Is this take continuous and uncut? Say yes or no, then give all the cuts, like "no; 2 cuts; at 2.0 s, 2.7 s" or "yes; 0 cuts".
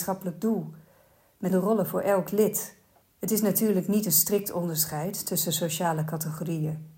no; 1 cut; at 1.5 s